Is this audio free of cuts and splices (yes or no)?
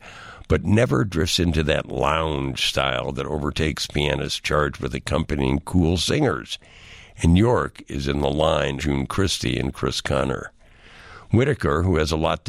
no